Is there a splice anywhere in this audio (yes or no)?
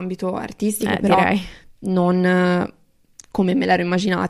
no